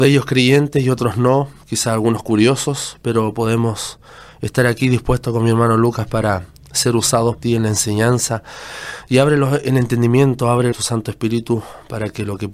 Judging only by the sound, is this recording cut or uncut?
cut